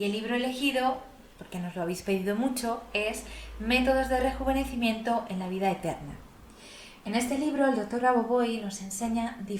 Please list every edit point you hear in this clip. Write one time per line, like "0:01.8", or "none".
none